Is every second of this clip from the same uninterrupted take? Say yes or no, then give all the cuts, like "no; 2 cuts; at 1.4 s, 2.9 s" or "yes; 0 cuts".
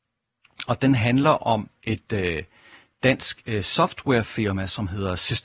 yes; 0 cuts